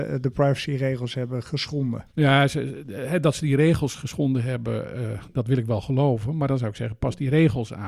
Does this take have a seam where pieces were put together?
yes; 1 cut; at 2.1 s

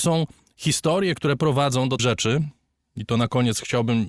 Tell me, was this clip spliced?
yes; 2 cuts; at 1.4 s, 2.0 s

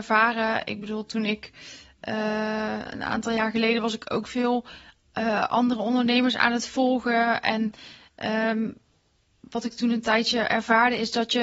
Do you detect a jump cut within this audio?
no; 0 cuts

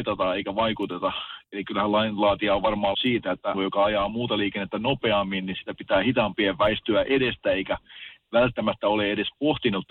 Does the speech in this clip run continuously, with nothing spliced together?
no; 2 cuts; at 2.9 s, 3.5 s

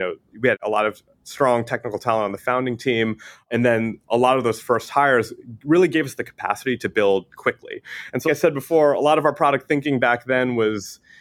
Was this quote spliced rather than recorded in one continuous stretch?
yes; 1 cut; at 8.3 s

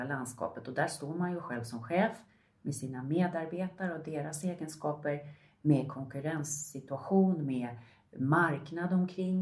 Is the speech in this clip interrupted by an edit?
no; 0 cuts

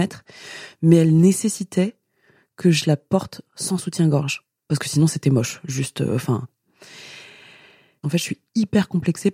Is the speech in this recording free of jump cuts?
yes; 0 cuts

